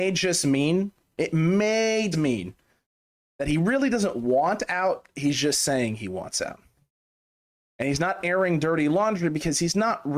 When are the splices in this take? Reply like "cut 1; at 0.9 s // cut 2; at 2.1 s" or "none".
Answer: cut 1; at 2.1 s